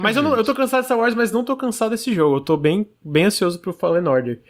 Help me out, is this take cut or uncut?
uncut